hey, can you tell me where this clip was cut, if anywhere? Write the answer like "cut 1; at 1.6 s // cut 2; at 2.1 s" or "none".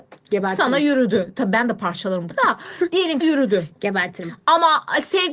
cut 1; at 2.3 s // cut 2; at 3.2 s